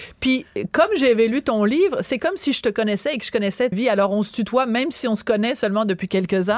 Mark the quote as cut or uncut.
cut